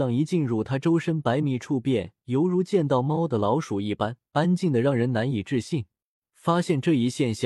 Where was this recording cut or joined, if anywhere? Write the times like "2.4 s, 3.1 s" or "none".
4.3 s, 6.1 s